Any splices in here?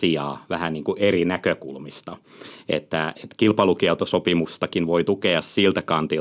no; 0 cuts

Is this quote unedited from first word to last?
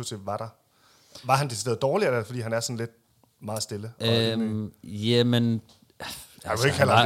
yes; 0 cuts

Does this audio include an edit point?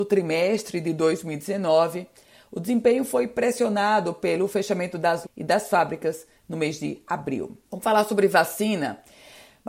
yes; 2 cuts; at 5.2 s, 7.6 s

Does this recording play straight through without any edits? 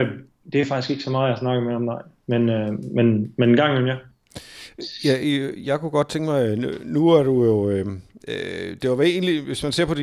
yes; 0 cuts

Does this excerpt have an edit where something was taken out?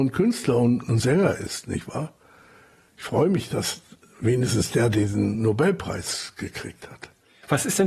no; 0 cuts

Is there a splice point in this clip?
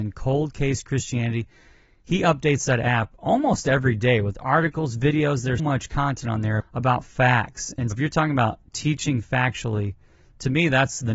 yes; 3 cuts; at 5.6 s, 6.6 s, 7.9 s

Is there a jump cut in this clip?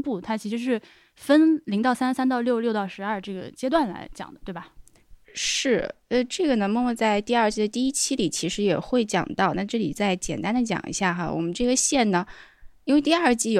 no; 0 cuts

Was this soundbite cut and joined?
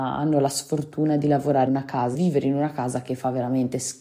yes; 2 cuts; at 1.7 s, 2.1 s

